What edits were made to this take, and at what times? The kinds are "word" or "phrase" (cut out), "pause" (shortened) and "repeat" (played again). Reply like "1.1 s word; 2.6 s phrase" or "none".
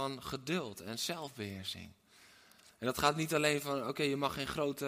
none